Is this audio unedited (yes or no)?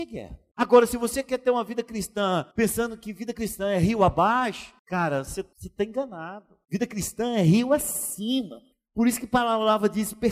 no